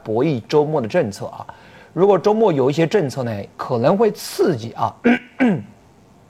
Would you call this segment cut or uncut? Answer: uncut